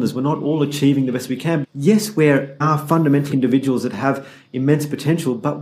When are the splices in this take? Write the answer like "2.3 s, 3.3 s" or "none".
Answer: 1.6 s, 2.6 s, 3.3 s